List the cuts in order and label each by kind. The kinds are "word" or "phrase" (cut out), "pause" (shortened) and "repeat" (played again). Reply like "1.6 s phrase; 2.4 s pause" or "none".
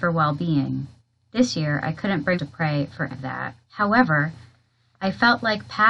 1.0 s pause; 2.3 s word; 3.1 s word; 3.6 s pause